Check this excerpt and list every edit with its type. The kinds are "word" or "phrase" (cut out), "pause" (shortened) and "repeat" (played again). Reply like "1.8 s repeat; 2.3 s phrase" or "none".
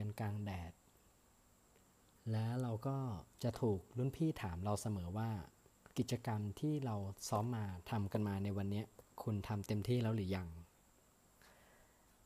3.3 s pause; 5.9 s pause